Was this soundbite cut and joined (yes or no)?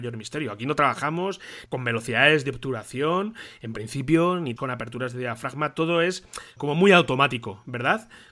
yes